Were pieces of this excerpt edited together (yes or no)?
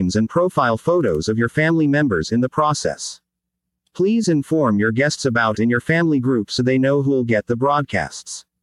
yes